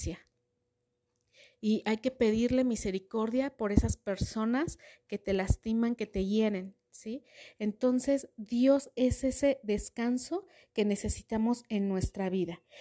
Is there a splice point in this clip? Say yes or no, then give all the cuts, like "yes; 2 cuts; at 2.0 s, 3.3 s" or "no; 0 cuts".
no; 0 cuts